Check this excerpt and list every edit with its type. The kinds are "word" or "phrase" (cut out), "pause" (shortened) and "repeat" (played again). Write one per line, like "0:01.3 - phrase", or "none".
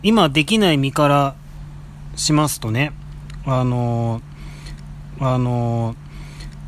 0:05.2 - repeat